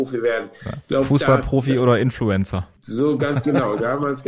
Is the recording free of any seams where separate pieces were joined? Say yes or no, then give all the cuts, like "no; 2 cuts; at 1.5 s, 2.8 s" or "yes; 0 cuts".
no; 1 cut; at 2.8 s